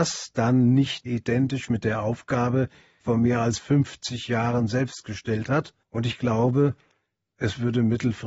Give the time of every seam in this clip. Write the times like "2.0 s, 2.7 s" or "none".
1.1 s, 3.0 s, 5.8 s